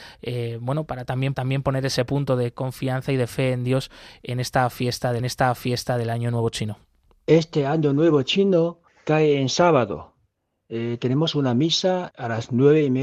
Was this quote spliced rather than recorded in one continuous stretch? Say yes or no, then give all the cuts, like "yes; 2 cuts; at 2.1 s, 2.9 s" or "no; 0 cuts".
yes; 4 cuts; at 1.3 s, 5.2 s, 8.9 s, 12.1 s